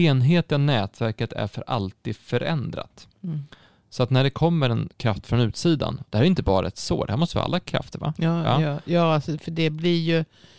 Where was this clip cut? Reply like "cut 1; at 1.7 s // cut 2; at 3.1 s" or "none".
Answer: none